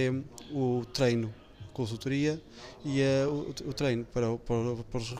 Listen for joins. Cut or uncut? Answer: uncut